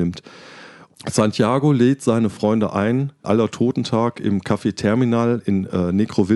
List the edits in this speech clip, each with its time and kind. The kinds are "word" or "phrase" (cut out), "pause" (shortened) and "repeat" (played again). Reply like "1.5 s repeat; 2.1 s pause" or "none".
3.2 s word